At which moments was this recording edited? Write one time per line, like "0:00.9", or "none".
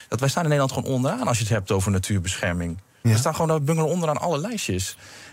none